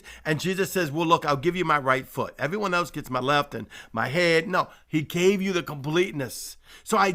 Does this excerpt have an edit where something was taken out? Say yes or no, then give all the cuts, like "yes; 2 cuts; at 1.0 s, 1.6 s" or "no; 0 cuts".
no; 0 cuts